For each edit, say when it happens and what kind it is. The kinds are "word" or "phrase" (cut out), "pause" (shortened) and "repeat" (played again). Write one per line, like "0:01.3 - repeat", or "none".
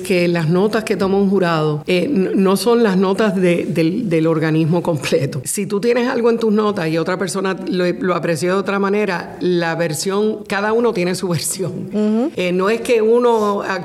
none